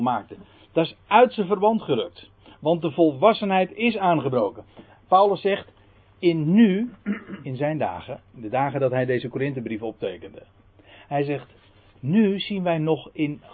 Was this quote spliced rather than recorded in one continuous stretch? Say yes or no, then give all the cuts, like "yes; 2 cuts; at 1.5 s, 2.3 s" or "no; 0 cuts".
yes; 1 cut; at 8.3 s